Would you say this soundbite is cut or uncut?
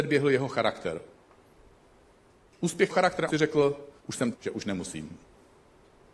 cut